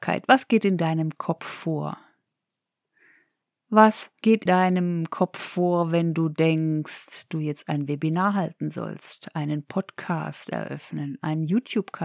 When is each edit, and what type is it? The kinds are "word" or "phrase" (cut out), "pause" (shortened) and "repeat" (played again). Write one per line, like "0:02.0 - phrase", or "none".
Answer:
0:04.5 - word
0:07.3 - word